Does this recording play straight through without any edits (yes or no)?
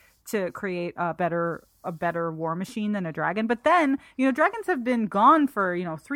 yes